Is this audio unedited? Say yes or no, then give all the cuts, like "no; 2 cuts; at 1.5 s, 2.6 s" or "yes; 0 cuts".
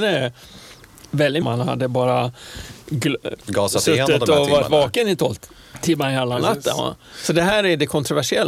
no; 1 cut; at 1.4 s